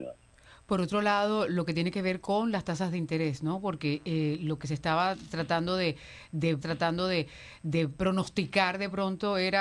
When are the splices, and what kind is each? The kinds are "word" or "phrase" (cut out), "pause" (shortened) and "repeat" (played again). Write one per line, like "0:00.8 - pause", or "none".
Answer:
0:06.6 - repeat

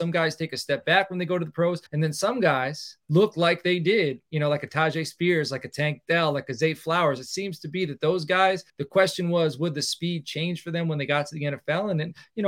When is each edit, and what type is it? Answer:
0:01.9 - pause
0:03.0 - pause
0:08.7 - pause

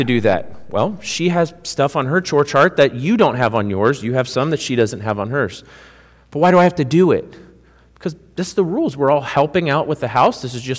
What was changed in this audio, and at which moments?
none

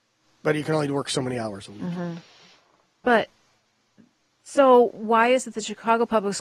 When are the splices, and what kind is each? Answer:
none

